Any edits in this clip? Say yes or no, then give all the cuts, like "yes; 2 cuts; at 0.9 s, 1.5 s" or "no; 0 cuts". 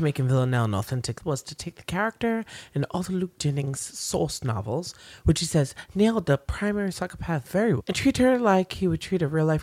yes; 2 cuts; at 1.2 s, 7.8 s